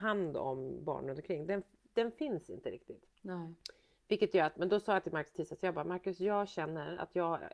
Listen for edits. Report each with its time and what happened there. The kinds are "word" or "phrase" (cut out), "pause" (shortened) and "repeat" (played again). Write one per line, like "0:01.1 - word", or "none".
0:01.8 - word
0:03.1 - pause